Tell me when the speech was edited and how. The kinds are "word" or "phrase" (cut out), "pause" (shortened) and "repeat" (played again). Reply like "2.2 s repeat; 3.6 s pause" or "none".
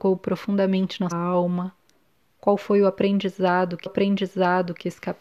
1.1 s word; 1.9 s pause; 3.9 s repeat